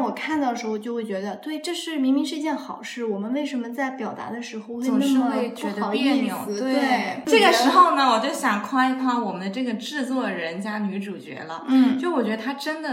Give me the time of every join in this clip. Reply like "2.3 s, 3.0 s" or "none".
none